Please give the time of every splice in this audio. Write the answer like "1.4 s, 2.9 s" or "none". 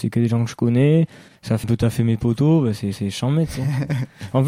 1.3 s, 1.6 s, 2.9 s